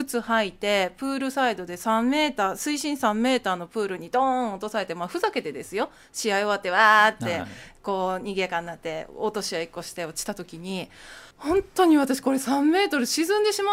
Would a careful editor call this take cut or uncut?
cut